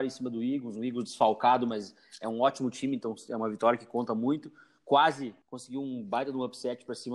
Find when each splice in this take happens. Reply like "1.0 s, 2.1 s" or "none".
5.4 s